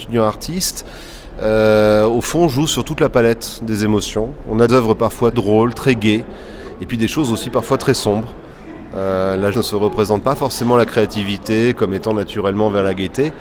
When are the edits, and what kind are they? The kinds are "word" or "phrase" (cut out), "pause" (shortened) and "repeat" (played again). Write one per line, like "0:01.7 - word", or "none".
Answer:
0:04.7 - word
0:05.3 - word
0:09.5 - word

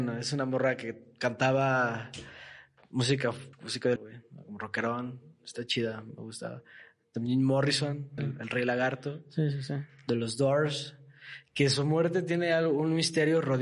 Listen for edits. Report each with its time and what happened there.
0:03.5 - pause
0:04.0 - phrase
0:08.2 - phrase

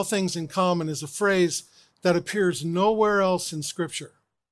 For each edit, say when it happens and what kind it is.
none

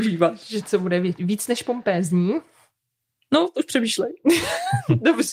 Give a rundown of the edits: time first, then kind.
none

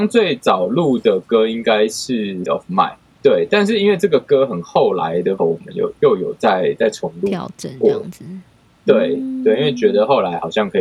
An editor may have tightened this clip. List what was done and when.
0:02.5 - word
0:03.2 - word
0:05.4 - word

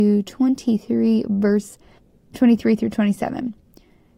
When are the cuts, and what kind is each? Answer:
0:02.0 - pause

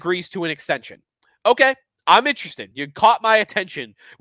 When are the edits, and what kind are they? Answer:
none

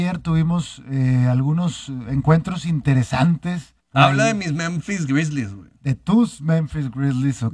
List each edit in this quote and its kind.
0:03.8 - pause

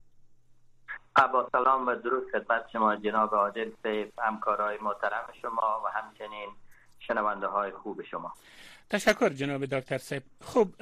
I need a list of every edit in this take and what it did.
none

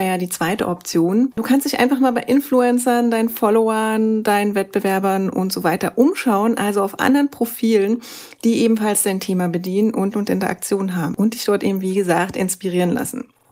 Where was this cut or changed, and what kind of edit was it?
0:10.1 - phrase

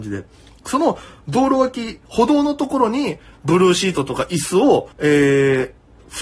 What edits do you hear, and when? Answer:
0:04.9 - pause

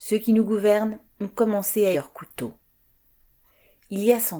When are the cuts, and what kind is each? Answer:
0:01.9 - word

